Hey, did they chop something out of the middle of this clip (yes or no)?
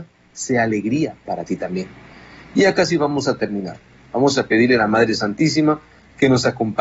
no